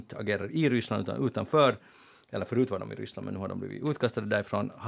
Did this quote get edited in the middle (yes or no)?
no